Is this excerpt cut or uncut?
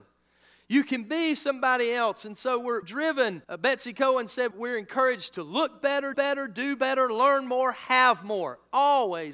cut